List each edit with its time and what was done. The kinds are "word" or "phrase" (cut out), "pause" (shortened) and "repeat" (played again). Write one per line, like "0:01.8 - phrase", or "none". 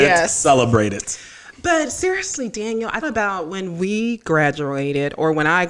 0:03.0 - word